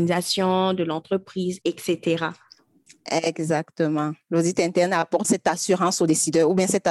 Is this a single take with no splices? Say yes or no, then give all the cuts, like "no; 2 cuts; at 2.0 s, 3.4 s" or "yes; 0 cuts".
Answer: no; 2 cuts; at 1.6 s, 5.2 s